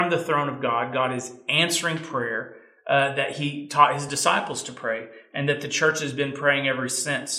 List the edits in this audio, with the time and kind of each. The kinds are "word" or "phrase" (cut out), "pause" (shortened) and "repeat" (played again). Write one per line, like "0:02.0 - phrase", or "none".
none